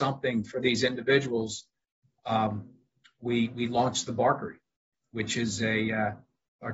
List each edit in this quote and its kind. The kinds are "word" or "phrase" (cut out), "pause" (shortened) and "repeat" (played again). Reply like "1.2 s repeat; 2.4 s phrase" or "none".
none